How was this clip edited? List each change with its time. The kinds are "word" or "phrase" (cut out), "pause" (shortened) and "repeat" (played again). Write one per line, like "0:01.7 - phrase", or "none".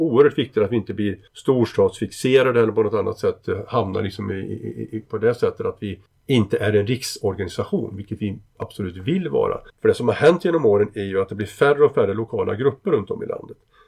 0:01.3 - pause
0:06.1 - pause
0:09.7 - pause